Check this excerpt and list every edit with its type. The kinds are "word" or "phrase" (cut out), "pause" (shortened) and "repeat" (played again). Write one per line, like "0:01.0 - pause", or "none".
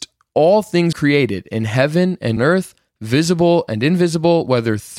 0:00.9 - word
0:02.4 - word

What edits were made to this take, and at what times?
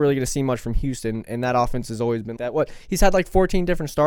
0:02.4 - word

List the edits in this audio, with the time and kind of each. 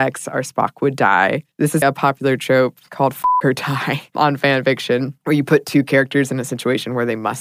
0:01.8 - word

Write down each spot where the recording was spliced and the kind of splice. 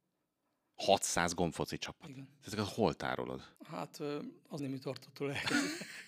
0:03.6 - pause
0:04.6 - word

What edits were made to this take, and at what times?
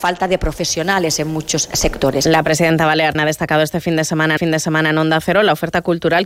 0:03.1 - word
0:04.4 - repeat

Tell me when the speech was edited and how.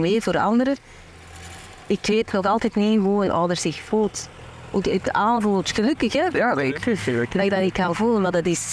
none

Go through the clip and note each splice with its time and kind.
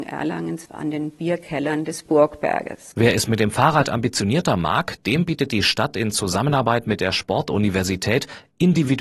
none

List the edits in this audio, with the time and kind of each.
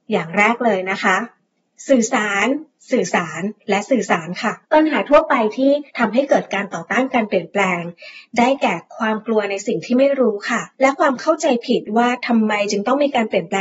0:04.6 - pause
0:05.9 - pause
0:10.7 - pause

